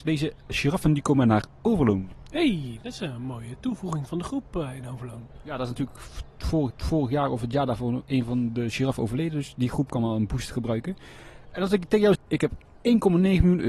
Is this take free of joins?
no; 2 cuts; at 6.7 s, 12.1 s

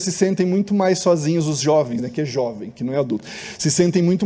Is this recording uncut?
yes; 0 cuts

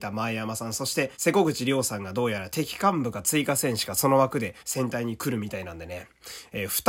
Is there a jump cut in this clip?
yes; 2 cuts; at 1.1 s, 4.6 s

